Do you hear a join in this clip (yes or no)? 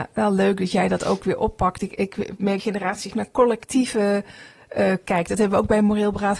yes